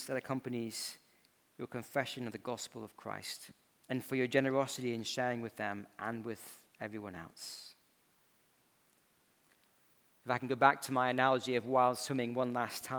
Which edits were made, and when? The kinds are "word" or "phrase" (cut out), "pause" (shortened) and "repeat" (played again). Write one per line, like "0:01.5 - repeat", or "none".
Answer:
0:03.7 - pause